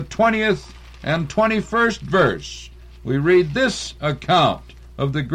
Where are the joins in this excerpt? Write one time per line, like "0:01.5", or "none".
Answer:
none

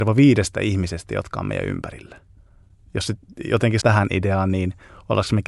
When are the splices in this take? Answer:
0:03.8

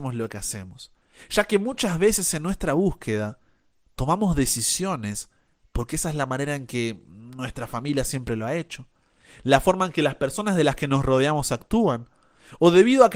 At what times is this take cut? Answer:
none

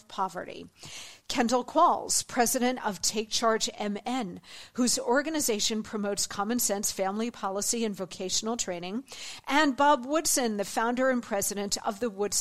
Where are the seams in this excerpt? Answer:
none

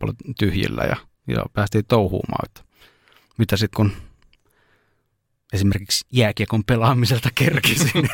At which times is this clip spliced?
0:01.5
0:02.4
0:03.7

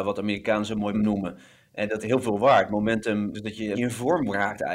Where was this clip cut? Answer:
0:00.9
0:02.0
0:03.3
0:03.7

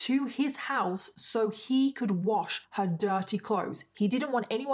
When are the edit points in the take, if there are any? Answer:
0:02.6

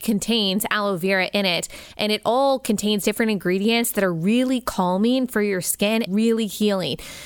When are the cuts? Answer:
0:06.1

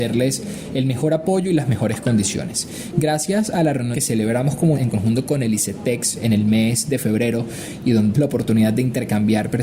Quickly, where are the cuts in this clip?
0:03.9
0:04.7
0:08.1

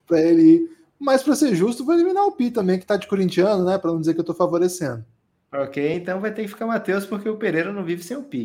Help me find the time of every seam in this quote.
none

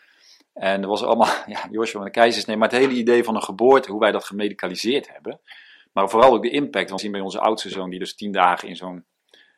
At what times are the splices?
0:07.0

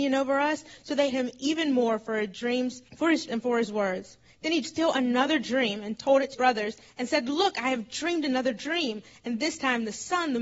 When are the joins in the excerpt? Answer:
0:01.1
0:02.9
0:03.3
0:04.6
0:06.3

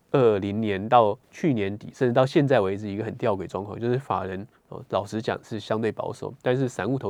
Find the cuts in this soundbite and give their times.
0:01.2

